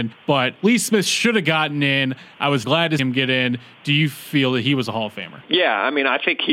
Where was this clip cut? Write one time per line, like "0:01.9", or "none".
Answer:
0:02.6
0:03.0
0:05.4